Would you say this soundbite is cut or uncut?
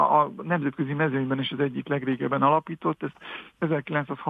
uncut